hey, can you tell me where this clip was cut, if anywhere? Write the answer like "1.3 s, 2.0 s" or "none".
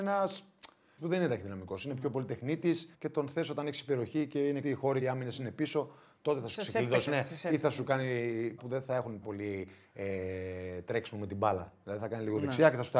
1.0 s, 2.9 s, 4.6 s, 5.0 s, 7.1 s, 8.6 s, 9.2 s